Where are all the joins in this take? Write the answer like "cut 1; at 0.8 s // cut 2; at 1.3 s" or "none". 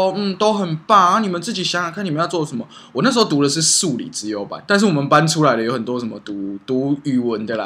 cut 1; at 4.7 s